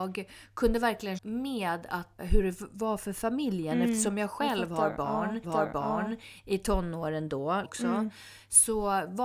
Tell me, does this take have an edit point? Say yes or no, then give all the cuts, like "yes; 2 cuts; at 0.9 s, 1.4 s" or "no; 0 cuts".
yes; 4 cuts; at 1.2 s, 2.2 s, 5.4 s, 7.6 s